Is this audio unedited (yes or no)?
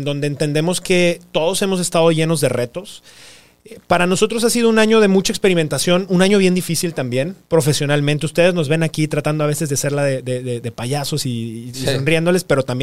yes